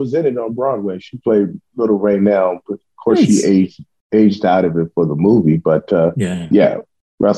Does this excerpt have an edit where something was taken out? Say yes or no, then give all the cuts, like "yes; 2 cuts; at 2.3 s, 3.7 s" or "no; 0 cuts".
no; 0 cuts